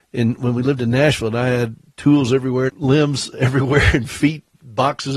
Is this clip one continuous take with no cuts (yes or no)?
yes